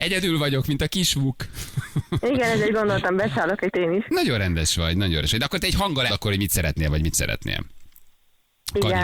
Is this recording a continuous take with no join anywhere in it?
no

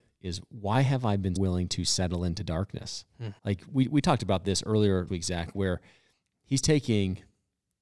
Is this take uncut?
no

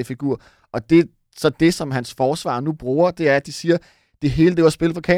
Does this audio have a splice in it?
no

